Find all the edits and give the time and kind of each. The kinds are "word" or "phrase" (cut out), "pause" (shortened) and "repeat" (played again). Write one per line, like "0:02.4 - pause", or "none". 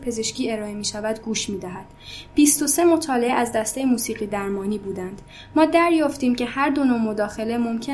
none